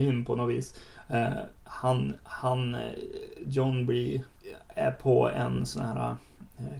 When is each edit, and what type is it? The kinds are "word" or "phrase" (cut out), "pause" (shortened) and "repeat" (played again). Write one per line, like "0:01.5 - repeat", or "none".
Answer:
none